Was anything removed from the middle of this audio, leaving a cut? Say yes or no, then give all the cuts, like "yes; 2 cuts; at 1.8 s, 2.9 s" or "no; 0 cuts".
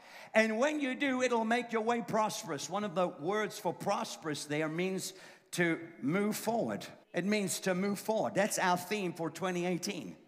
yes; 1 cut; at 7.0 s